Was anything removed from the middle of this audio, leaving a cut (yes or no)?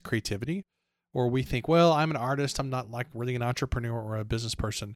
no